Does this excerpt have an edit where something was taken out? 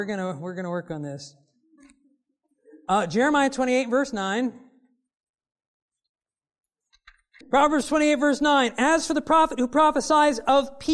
no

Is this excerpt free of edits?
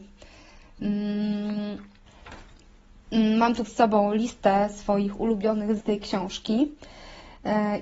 no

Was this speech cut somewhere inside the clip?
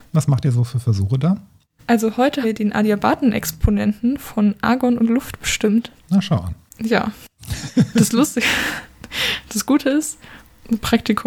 yes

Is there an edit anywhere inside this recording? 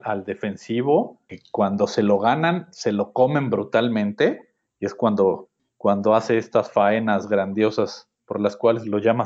no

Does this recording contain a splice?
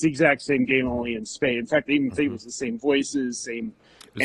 no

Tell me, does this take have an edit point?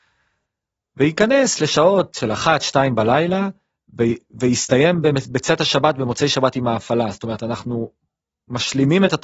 no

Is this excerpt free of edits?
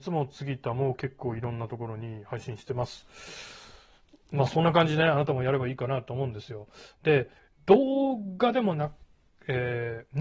no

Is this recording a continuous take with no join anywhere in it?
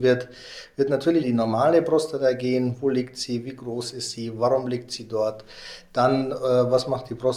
no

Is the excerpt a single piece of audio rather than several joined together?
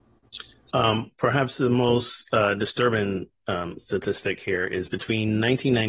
yes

